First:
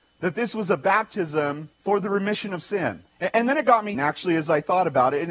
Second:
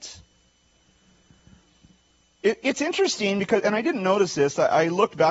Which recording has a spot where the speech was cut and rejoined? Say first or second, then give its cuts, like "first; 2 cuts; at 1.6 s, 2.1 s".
first; 3 cuts; at 1.7 s, 3.1 s, 3.9 s